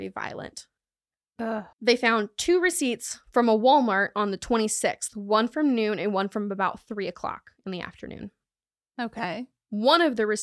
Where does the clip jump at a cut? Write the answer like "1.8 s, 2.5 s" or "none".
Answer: 1.7 s